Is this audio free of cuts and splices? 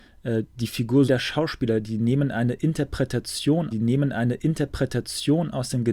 no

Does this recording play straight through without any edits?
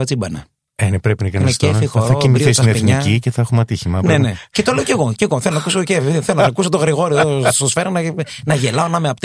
yes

